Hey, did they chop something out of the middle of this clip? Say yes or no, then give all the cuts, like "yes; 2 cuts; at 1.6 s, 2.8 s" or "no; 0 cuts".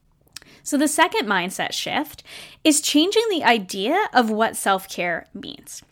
no; 0 cuts